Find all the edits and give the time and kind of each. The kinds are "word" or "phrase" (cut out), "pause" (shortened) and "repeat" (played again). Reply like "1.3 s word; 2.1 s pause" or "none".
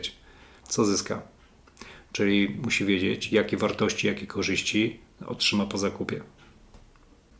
none